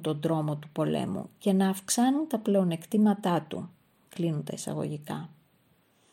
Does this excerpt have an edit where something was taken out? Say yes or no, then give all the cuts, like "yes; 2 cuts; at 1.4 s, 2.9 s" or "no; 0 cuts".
no; 0 cuts